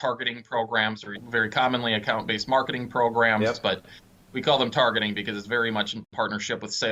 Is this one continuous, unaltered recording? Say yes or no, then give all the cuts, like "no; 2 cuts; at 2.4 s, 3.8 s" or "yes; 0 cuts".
yes; 0 cuts